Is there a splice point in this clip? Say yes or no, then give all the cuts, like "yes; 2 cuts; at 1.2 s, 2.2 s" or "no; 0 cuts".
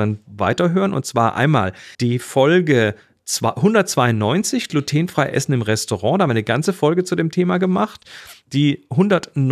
yes; 1 cut; at 1.9 s